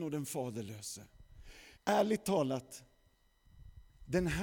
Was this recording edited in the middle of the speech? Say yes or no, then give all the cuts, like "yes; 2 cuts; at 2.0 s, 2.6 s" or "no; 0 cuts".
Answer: yes; 1 cut; at 1.7 s